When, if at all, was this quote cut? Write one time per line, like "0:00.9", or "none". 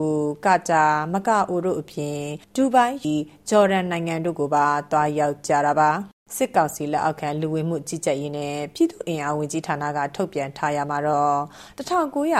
0:02.4
0:03.0
0:06.2

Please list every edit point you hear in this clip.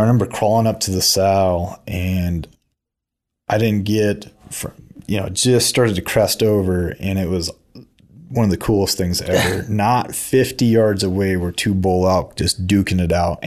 none

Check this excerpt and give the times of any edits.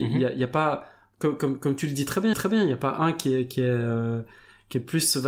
0:02.3

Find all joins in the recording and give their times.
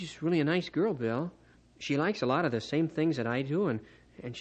none

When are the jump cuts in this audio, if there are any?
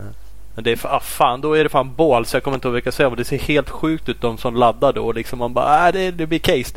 none

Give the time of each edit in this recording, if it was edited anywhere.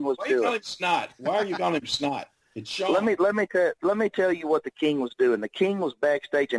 none

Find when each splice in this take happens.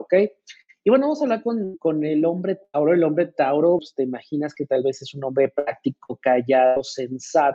0:03.8

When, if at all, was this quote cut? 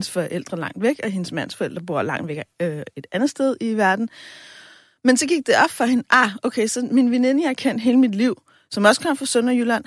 none

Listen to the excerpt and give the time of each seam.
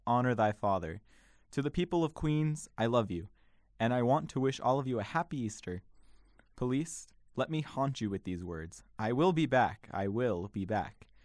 none

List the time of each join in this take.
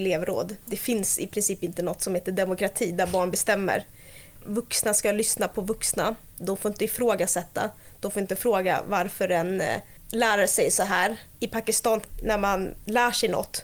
0:11.3

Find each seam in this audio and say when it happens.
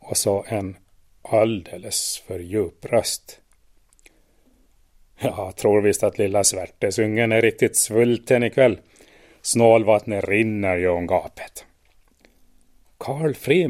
none

